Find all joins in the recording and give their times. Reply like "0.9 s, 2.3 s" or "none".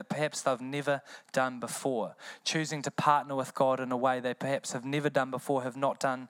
none